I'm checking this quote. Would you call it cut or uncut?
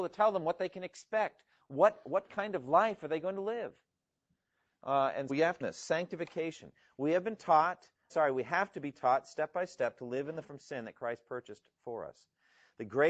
cut